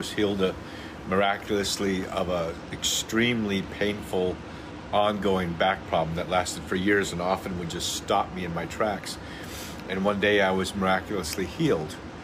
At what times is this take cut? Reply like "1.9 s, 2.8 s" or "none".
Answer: none